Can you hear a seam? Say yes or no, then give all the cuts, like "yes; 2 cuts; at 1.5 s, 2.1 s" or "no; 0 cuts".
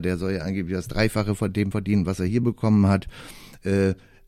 no; 0 cuts